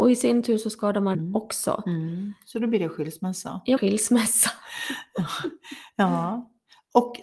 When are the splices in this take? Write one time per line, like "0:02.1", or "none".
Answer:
0:01.1
0:03.8